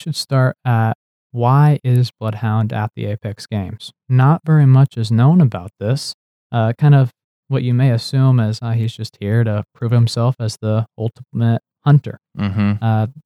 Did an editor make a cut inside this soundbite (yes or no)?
no